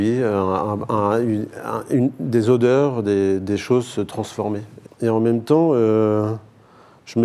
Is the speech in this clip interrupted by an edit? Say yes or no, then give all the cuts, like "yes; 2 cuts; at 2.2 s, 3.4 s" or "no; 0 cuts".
yes; 1 cut; at 4.9 s